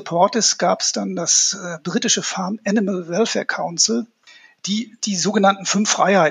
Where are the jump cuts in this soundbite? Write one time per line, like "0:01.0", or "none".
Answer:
none

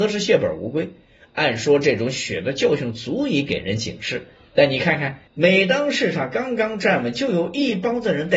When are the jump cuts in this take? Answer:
0:05.3

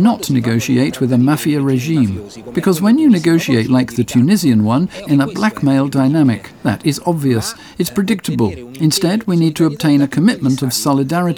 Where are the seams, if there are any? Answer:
0:03.7
0:05.1

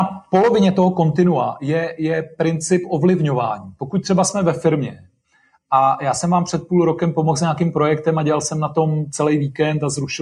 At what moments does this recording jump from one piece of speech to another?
none

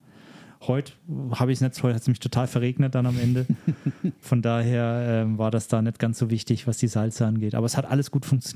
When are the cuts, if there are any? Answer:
0:01.8
0:04.2

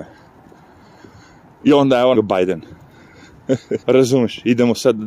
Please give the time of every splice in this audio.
0:02.1
0:03.8

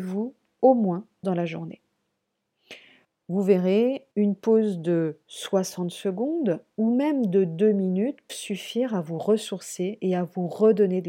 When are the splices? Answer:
0:01.2
0:03.0
0:04.1
0:05.2
0:08.3

